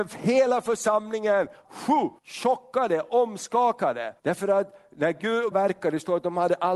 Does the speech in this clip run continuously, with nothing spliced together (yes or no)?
no